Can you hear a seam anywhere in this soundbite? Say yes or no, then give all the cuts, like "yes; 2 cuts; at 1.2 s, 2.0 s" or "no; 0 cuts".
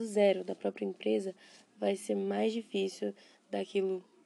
no; 0 cuts